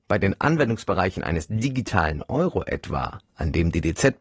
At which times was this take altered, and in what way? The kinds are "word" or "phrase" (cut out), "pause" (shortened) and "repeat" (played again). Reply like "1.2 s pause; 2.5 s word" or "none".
none